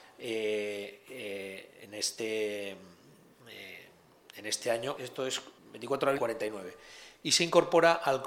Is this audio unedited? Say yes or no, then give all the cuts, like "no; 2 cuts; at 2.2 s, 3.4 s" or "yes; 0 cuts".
no; 3 cuts; at 5.0 s, 5.6 s, 6.2 s